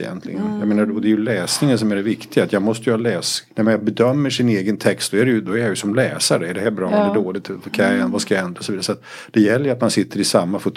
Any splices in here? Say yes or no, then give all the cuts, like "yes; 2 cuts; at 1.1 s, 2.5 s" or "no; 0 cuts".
yes; 1 cut; at 3.5 s